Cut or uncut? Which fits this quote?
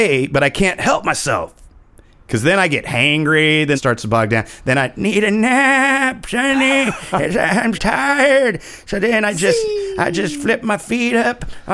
cut